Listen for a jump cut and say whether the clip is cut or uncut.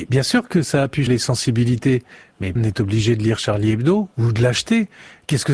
cut